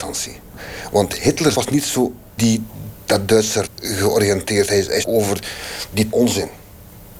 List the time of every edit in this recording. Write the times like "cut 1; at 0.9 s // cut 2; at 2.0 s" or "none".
cut 1; at 1.5 s // cut 2; at 2.4 s // cut 3; at 3.7 s // cut 4; at 5.0 s // cut 5; at 6.1 s